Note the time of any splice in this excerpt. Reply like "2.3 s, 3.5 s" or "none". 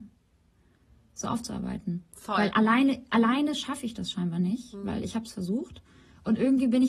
none

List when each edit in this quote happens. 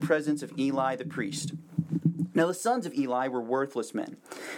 none

